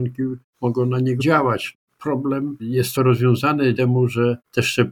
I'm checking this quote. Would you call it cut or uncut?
cut